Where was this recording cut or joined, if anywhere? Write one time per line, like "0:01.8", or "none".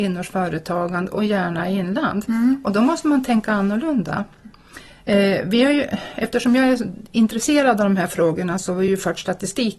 none